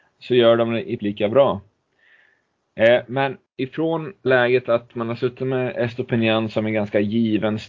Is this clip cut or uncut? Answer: cut